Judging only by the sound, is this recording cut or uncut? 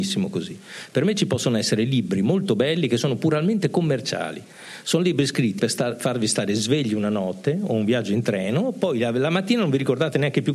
cut